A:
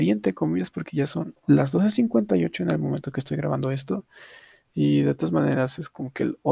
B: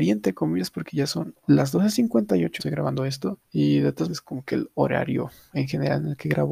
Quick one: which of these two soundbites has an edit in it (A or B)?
B